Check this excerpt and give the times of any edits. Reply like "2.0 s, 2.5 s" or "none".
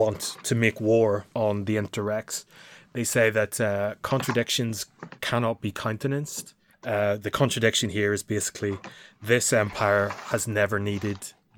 1.3 s, 6.7 s